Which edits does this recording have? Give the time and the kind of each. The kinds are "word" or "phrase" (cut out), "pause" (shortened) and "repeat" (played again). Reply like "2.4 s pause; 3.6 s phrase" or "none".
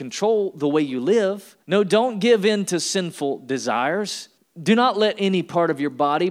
1.6 s pause; 4.4 s pause